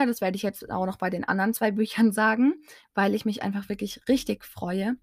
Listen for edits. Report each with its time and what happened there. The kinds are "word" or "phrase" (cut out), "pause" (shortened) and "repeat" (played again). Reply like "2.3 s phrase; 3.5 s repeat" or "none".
none